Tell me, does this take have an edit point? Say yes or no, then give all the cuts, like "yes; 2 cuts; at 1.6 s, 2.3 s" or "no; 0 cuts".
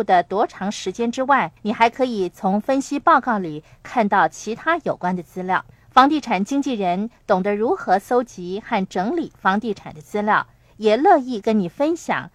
yes; 2 cuts; at 1.6 s, 5.7 s